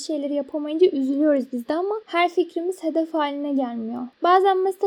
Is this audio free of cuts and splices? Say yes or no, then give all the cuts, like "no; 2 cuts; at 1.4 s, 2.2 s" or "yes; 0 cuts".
yes; 0 cuts